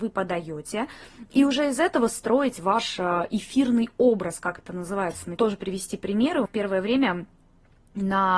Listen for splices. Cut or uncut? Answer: cut